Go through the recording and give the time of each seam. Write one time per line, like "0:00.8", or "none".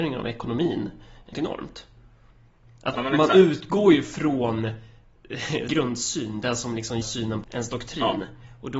0:01.3
0:02.9
0:05.7
0:07.0
0:07.4